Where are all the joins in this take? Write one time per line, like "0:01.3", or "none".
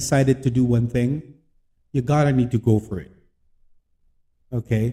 none